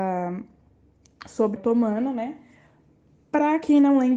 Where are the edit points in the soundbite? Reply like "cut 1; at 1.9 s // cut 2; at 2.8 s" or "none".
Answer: cut 1; at 1.6 s